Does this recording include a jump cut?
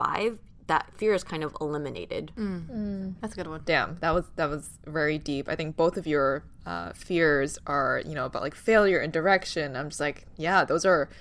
no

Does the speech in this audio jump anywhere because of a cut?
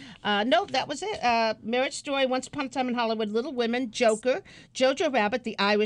no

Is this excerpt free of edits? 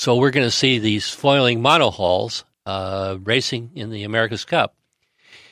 no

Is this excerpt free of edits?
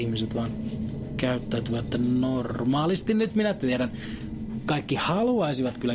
yes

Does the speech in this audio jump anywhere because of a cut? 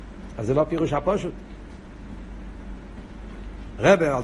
no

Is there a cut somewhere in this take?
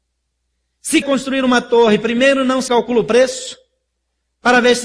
yes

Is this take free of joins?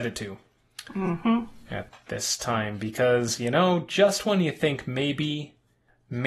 yes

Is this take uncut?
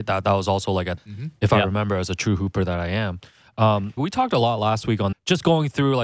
no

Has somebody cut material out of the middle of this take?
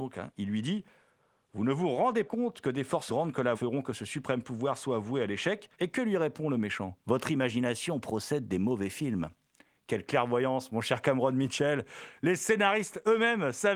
yes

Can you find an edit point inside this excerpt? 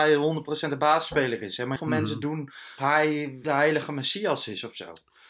yes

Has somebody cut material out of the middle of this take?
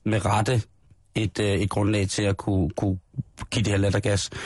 no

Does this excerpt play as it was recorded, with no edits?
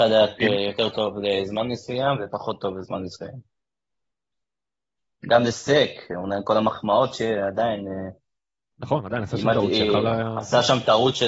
yes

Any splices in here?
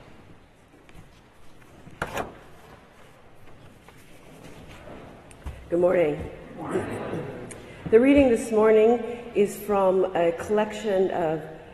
no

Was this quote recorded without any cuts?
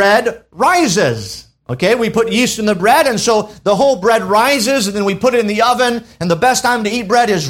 yes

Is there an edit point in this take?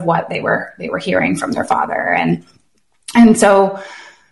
no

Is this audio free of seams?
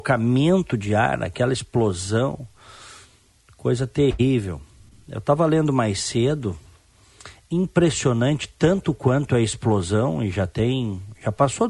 yes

